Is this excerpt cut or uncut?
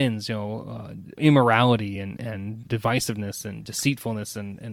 uncut